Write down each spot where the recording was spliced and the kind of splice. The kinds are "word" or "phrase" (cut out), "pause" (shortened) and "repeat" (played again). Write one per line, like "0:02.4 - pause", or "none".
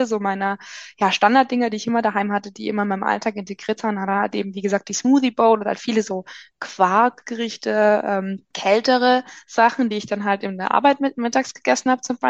0:08.5 - pause

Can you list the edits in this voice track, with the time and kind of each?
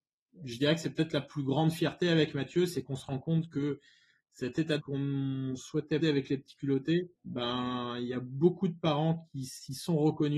0:04.8 - phrase
0:06.0 - word
0:07.2 - pause

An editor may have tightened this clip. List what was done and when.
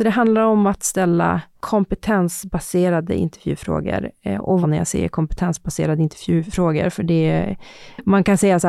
0:04.6 - phrase

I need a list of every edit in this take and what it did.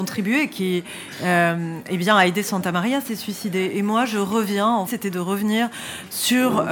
0:04.9 - phrase

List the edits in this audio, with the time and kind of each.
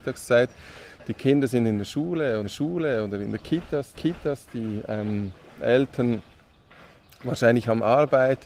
0:02.4 - repeat
0:03.9 - repeat

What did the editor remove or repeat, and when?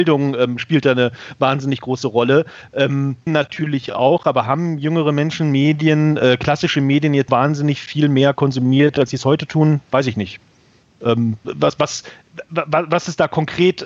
0:03.3 - word
0:07.3 - word
0:11.4 - word

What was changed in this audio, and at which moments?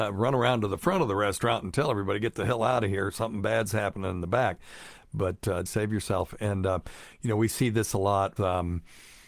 0:05.7 - word
0:08.4 - word

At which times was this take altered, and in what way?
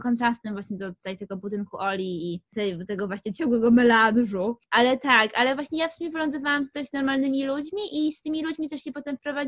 none

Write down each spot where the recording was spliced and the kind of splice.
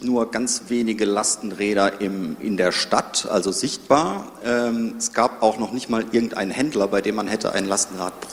none

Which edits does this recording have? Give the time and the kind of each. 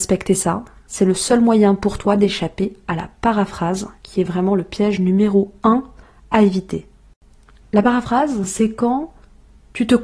none

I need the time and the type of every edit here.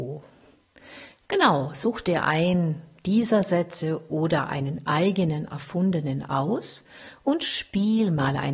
none

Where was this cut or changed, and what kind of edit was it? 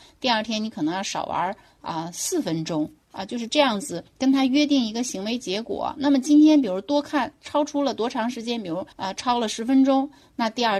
0:04.1 - pause
0:08.9 - pause

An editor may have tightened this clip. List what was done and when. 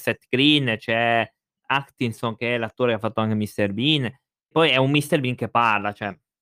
0:01.6 - word
0:04.5 - word

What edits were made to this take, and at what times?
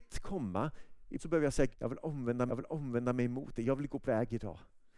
0:01.2 - phrase
0:01.7 - word
0:02.5 - repeat
0:04.0 - word

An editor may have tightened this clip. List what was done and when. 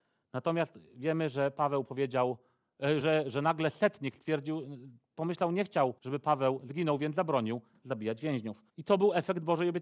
0:03.0 - word
0:06.0 - pause
0:08.7 - pause

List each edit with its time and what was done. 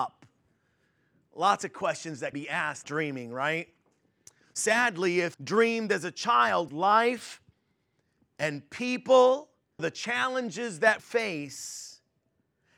0:02.3 - word
0:02.8 - word
0:05.3 - word
0:06.7 - word
0:09.8 - word
0:11.0 - word

